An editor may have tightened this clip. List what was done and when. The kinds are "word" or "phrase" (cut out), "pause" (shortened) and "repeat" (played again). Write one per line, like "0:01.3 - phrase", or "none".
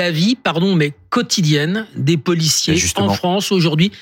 none